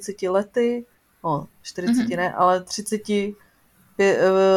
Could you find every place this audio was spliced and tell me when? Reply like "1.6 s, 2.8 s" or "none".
none